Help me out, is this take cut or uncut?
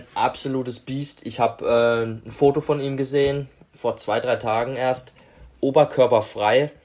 uncut